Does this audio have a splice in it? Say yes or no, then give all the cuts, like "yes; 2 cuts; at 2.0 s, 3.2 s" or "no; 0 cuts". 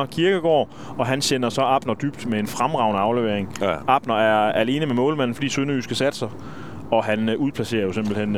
no; 0 cuts